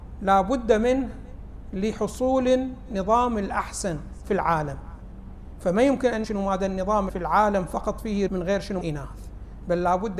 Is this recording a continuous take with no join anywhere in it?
no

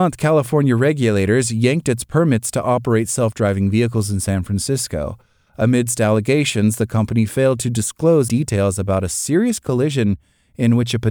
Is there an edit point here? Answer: yes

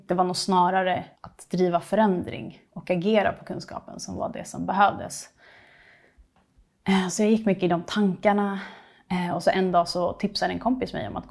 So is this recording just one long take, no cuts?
no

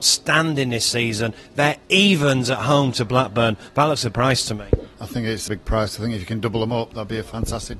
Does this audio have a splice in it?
yes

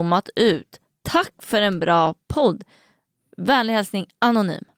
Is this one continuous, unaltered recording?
yes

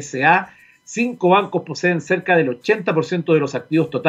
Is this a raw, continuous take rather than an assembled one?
yes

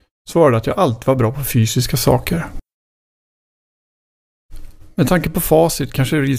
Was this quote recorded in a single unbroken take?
yes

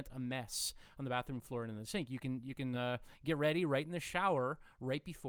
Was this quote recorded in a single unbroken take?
yes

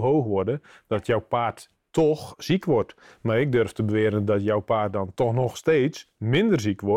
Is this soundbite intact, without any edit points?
yes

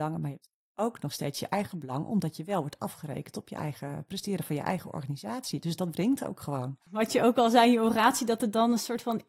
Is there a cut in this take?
yes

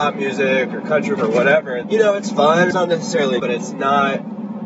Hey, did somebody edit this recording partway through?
yes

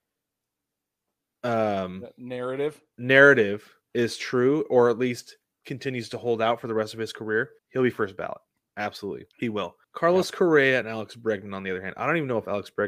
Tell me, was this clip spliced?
yes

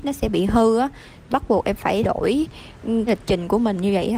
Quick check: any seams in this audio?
yes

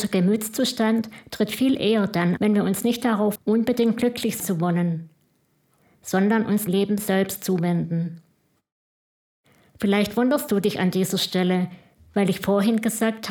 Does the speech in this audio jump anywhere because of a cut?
yes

